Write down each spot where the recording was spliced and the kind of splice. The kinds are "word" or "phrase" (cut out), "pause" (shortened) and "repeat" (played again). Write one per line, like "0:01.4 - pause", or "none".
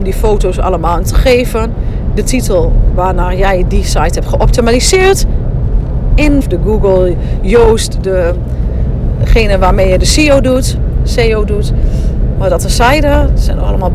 0:01.0 - word
0:06.4 - phrase

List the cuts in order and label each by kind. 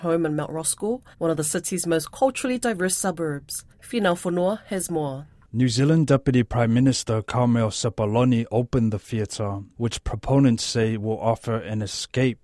0:01.1 - pause
0:03.7 - pause

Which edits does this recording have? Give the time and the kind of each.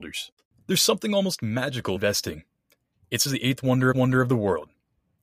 0:02.0 - phrase
0:03.3 - word
0:03.9 - repeat

